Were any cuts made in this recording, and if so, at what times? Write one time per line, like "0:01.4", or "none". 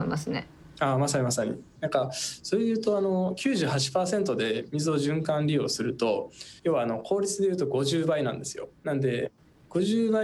0:01.8
0:06.6
0:08.8